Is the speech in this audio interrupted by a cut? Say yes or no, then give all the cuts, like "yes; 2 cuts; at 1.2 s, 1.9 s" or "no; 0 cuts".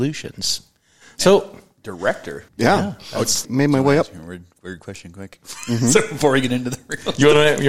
yes; 2 cuts; at 2.5 s, 3.4 s